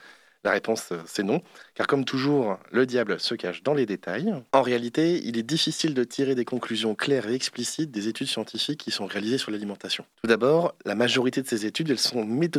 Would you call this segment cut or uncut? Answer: cut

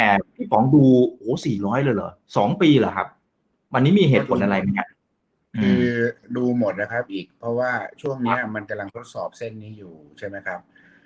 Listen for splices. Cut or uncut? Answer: uncut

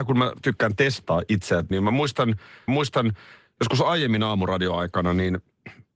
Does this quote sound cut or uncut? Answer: cut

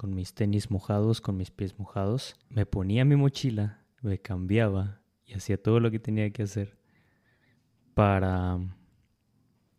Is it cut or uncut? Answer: cut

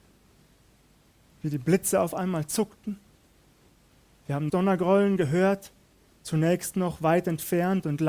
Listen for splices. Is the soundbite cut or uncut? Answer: cut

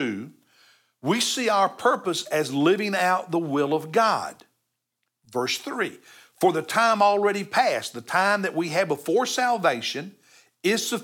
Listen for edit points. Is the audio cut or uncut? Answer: uncut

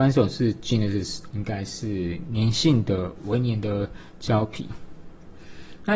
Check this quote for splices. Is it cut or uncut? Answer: cut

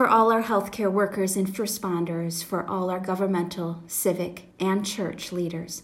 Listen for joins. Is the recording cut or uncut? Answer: cut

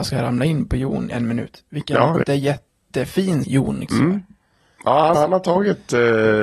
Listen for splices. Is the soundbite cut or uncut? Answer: cut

